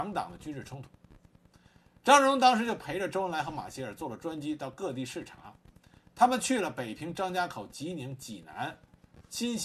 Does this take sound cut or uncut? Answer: uncut